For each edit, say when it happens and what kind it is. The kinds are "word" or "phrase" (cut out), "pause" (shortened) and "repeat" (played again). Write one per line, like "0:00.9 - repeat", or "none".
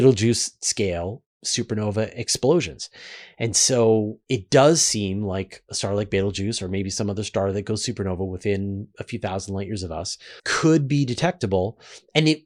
0:04.2 - pause
0:10.4 - pause